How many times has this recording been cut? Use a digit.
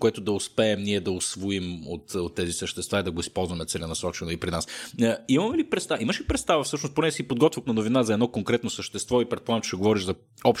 2